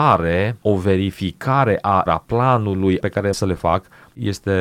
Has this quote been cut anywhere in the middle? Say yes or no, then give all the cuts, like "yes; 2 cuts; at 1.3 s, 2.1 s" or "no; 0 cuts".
yes; 3 cuts; at 2.1 s, 3.0 s, 3.3 s